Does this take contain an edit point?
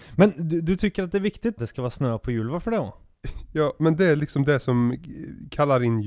yes; 1 cut; at 1.6 s

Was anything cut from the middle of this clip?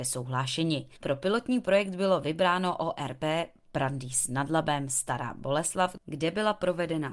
yes; 1 cut; at 1.0 s

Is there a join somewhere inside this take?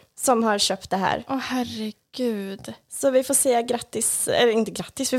no; 0 cuts

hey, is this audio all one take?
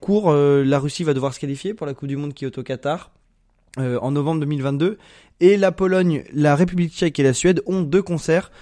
yes; 0 cuts

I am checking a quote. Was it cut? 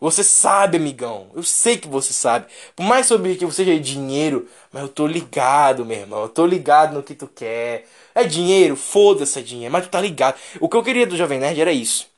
no; 0 cuts

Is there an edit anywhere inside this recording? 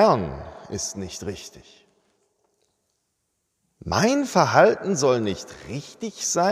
no; 0 cuts

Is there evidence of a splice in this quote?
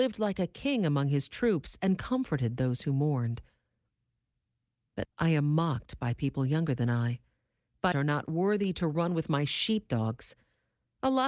yes; 2 cuts; at 5.0 s, 7.9 s

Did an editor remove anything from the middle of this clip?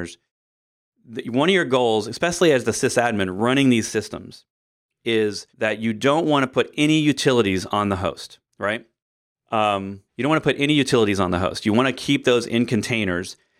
yes; 3 cuts; at 5.5 s, 8.5 s, 10.1 s

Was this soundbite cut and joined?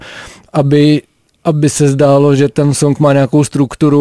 no; 0 cuts

